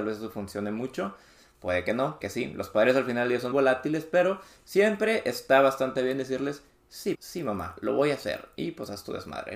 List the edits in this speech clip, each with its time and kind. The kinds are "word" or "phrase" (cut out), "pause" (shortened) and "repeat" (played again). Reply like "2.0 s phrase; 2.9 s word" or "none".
2.2 s word; 3.5 s word; 7.1 s word